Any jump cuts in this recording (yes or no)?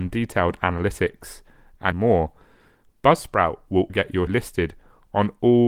yes